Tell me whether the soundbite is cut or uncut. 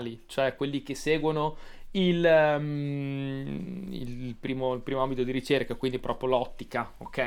uncut